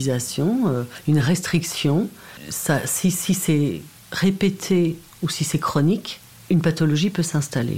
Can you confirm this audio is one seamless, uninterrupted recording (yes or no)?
yes